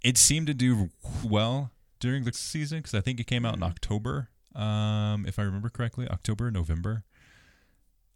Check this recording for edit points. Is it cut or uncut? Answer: cut